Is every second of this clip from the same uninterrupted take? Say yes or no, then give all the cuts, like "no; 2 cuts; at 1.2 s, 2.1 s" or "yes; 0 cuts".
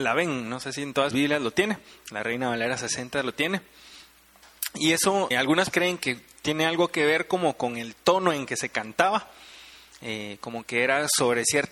no; 3 cuts; at 1.1 s, 5.3 s, 5.7 s